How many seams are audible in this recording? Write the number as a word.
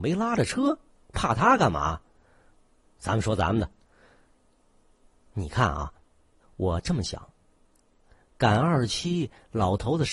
zero